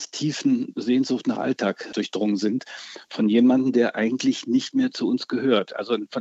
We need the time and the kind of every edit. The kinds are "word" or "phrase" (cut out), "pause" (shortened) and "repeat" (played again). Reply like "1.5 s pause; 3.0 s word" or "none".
none